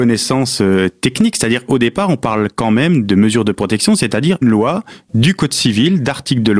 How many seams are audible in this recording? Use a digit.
1